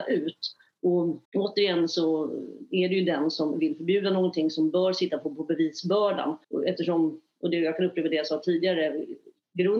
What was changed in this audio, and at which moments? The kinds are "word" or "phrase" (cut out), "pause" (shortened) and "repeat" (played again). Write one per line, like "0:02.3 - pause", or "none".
0:01.3 - pause
0:06.4 - pause